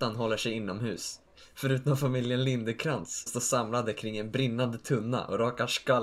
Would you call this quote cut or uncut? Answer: cut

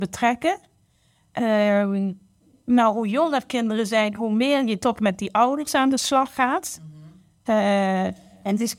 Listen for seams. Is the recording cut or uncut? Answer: uncut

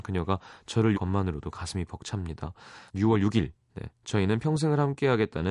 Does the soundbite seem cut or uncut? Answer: cut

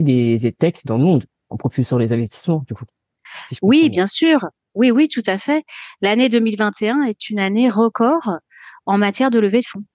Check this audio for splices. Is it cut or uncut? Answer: uncut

